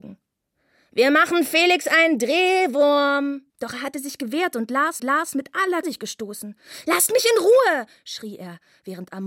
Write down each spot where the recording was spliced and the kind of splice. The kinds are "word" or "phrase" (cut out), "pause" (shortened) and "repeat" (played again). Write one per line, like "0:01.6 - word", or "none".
0:03.5 - pause
0:05.0 - repeat
0:05.8 - phrase